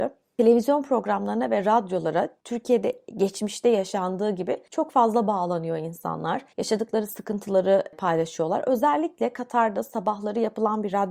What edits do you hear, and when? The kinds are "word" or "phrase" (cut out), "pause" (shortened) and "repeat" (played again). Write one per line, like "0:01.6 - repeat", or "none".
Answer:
0:06.5 - pause